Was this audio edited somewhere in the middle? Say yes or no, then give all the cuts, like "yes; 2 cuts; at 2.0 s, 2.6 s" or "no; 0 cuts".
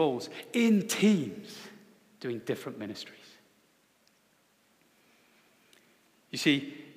no; 0 cuts